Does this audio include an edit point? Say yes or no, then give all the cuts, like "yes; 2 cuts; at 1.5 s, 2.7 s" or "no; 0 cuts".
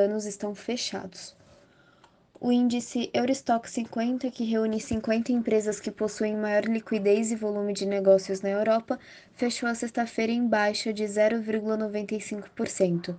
no; 0 cuts